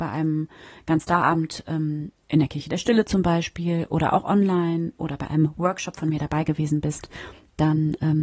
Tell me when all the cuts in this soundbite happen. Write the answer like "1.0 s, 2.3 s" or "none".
2.2 s